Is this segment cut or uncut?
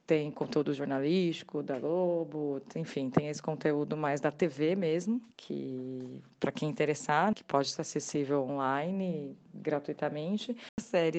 cut